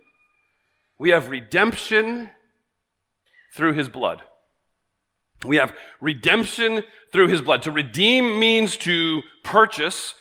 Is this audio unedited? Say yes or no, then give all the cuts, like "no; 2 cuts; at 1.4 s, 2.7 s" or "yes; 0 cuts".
yes; 0 cuts